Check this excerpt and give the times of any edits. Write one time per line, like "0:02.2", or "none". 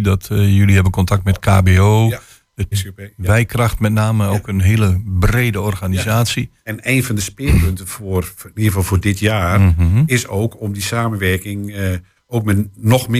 0:02.7
0:06.6